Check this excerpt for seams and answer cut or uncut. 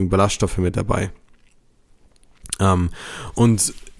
uncut